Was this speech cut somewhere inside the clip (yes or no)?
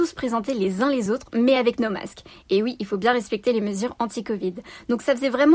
no